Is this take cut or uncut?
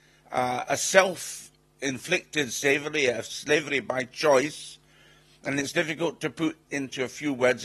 cut